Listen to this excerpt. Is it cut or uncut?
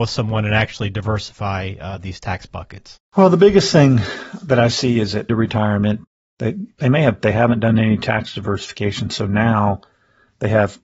cut